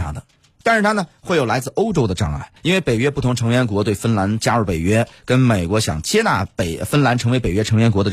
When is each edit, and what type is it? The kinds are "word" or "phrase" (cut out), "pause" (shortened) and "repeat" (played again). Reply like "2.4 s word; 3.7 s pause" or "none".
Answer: 2.6 s pause